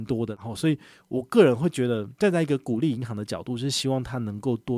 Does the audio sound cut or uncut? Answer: cut